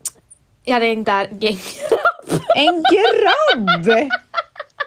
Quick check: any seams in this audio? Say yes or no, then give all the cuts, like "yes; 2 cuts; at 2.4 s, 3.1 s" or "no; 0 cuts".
yes; 1 cut; at 1.0 s